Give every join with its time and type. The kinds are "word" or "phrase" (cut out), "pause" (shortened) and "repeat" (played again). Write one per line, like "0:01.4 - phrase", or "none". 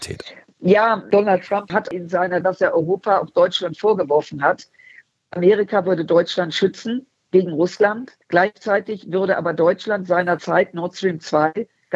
0:01.1 - word
0:02.4 - phrase
0:08.2 - pause